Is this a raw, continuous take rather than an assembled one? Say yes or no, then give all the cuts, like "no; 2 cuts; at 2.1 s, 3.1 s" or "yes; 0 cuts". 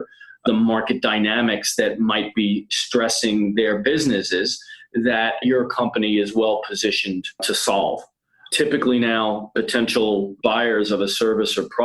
yes; 0 cuts